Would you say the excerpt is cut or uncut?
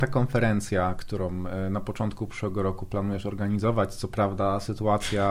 uncut